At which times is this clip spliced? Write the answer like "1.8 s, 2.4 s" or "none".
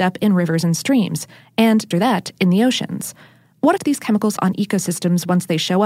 1.9 s, 3.8 s, 4.4 s